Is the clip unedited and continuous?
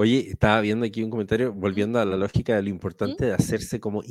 yes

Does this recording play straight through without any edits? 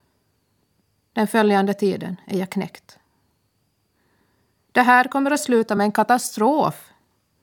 yes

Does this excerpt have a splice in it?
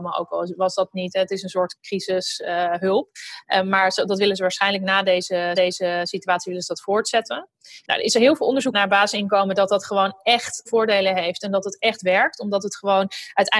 yes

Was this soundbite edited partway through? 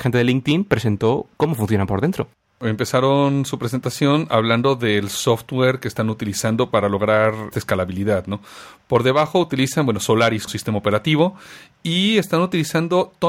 yes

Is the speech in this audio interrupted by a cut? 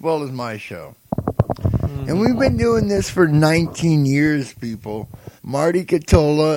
yes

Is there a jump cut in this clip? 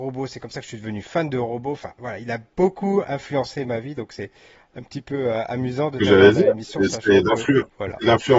no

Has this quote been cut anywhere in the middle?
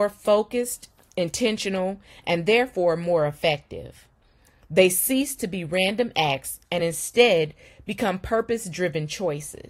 no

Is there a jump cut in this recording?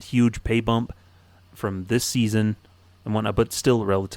yes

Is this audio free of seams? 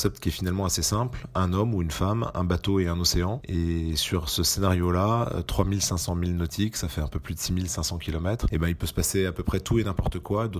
yes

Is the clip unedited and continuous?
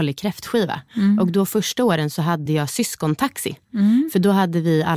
yes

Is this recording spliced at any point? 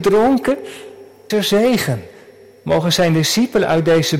yes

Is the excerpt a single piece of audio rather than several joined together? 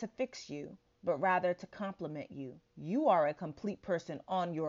no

